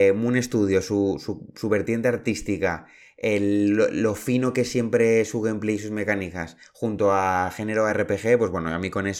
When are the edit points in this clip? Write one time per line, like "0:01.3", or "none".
none